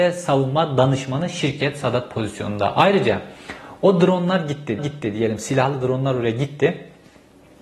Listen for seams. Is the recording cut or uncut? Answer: cut